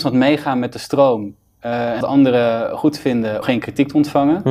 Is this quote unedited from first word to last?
no; 2 cuts; at 2.0 s, 3.4 s

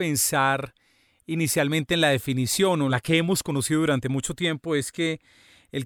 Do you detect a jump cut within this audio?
no; 0 cuts

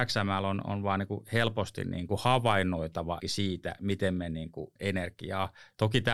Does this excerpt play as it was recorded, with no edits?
no; 3 cuts; at 2.1 s, 3.2 s, 4.8 s

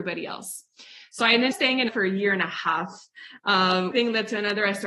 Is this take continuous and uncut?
no; 3 cuts; at 1.5 s, 1.9 s, 3.9 s

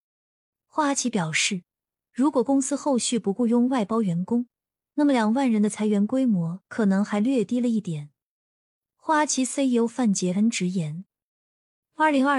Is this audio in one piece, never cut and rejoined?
yes; 0 cuts

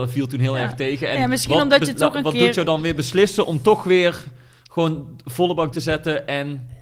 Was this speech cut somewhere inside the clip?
yes; 1 cut; at 5.7 s

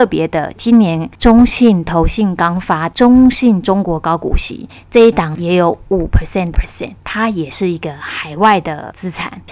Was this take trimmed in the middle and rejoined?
yes; 1 cut; at 6.5 s

